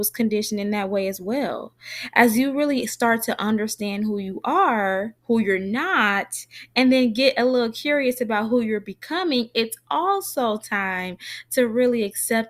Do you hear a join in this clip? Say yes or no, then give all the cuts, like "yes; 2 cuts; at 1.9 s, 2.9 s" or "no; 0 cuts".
yes; 1 cut; at 5.2 s